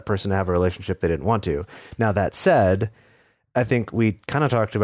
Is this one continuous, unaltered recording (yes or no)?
yes